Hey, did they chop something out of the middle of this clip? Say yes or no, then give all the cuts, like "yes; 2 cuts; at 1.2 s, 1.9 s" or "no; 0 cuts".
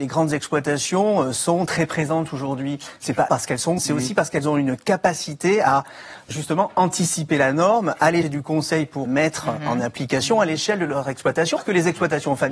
yes; 6 cuts; at 3.3 s, 3.8 s, 6.3 s, 8.2 s, 9.1 s, 11.6 s